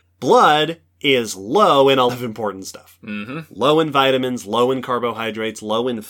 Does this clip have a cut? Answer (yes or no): yes